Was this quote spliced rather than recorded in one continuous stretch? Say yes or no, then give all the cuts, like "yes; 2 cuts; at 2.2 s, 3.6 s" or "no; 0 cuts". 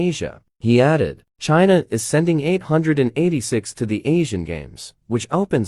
yes; 2 cuts; at 1.3 s, 3.7 s